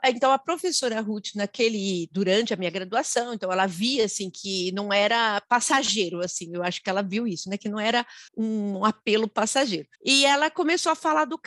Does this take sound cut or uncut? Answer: cut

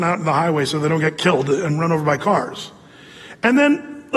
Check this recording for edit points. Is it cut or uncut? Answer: uncut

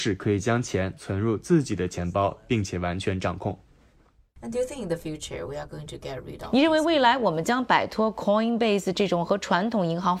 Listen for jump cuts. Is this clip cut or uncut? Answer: uncut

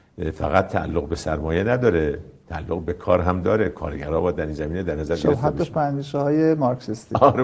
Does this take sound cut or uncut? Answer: uncut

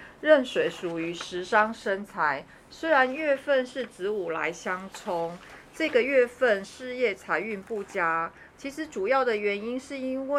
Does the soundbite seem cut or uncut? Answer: uncut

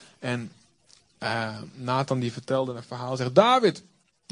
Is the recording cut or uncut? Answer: uncut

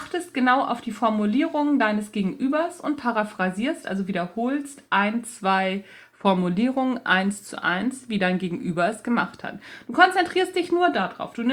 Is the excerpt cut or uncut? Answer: uncut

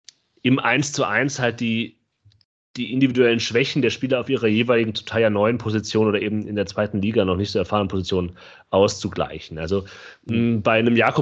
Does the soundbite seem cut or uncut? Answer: uncut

